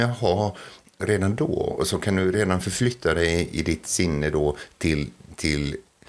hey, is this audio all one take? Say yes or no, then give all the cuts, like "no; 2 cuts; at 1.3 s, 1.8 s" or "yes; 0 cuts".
yes; 0 cuts